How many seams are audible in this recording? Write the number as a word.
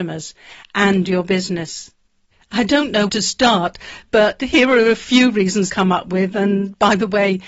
three